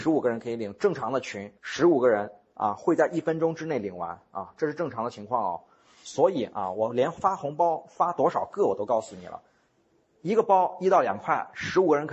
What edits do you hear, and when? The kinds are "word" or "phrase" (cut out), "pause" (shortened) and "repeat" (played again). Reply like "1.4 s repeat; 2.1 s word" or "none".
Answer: 1.6 s pause